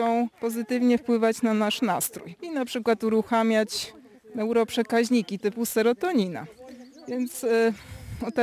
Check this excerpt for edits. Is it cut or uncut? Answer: uncut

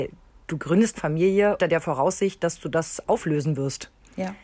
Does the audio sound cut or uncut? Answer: cut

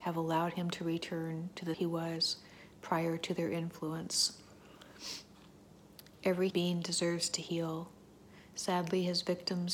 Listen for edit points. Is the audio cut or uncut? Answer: cut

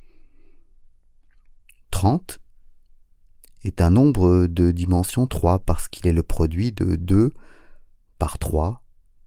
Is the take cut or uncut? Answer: uncut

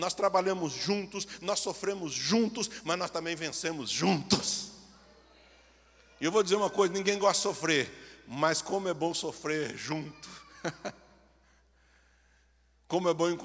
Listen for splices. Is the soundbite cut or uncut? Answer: uncut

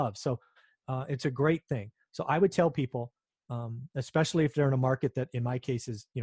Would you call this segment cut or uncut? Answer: uncut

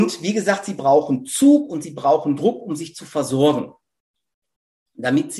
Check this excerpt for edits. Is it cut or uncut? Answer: uncut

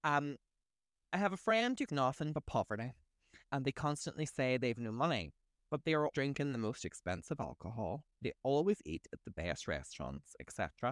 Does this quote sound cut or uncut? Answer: cut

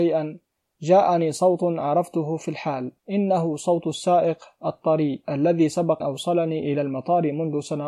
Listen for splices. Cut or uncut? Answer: cut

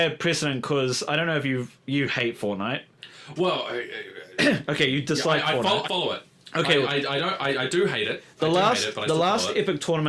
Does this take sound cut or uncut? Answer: cut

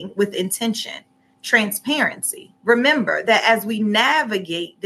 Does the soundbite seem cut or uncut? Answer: cut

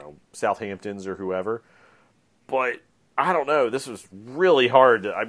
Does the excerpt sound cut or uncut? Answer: uncut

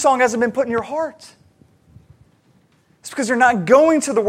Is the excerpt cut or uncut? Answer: uncut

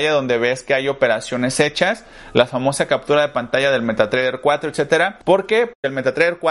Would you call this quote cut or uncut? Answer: cut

